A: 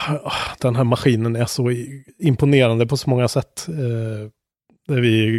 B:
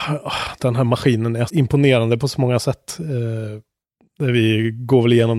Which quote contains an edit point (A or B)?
B